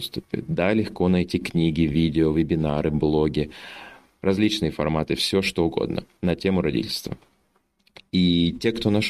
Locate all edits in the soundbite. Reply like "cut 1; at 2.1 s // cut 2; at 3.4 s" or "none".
none